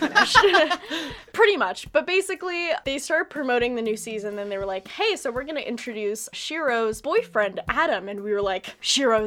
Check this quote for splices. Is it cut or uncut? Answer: cut